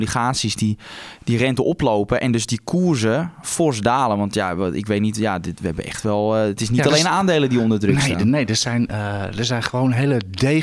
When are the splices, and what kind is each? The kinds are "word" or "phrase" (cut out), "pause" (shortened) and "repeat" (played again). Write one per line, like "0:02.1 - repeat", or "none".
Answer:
none